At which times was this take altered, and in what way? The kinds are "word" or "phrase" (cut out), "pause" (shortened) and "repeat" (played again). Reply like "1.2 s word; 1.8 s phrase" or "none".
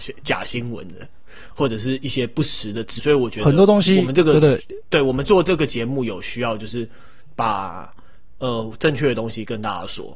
3.0 s phrase